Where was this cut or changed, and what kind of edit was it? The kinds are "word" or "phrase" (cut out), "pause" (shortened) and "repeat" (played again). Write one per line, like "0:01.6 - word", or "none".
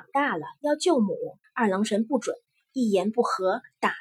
0:01.4 - pause
0:02.5 - pause